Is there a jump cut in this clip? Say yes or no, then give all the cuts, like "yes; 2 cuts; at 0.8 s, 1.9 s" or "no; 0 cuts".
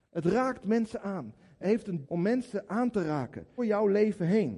yes; 3 cuts; at 1.6 s, 2.0 s, 3.6 s